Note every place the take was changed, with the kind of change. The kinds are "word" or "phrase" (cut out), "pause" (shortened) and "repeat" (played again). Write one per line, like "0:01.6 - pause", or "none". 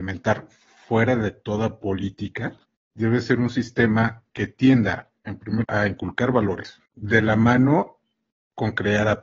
0:02.6 - pause
0:04.3 - pause
0:05.6 - word
0:06.9 - pause